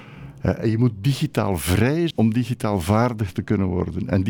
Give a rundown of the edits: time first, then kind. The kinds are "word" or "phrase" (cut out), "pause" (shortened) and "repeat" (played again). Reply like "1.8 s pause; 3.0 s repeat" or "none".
2.1 s word